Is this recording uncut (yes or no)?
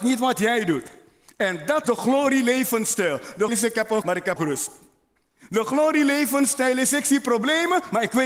no